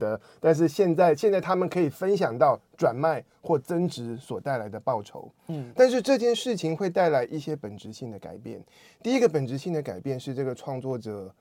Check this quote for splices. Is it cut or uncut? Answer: uncut